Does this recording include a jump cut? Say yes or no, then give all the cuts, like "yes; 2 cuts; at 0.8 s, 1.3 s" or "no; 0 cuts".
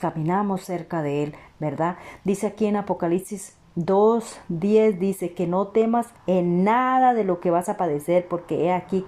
yes; 1 cut; at 6.2 s